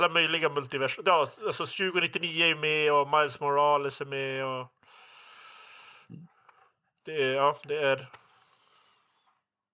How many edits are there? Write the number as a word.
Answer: zero